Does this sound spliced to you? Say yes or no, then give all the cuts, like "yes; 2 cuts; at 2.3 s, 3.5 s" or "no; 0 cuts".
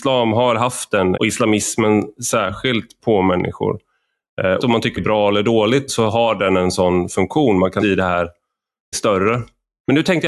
yes; 7 cuts; at 1.1 s, 3.0 s, 4.6 s, 5.0 s, 5.9 s, 7.8 s, 8.9 s